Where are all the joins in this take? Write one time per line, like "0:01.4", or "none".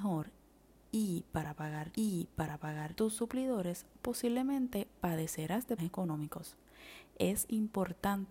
0:01.9
0:05.8